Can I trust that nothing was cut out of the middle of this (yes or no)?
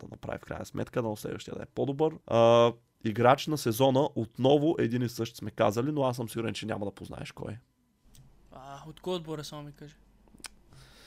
no